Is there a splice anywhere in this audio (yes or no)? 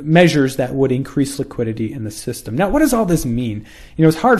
no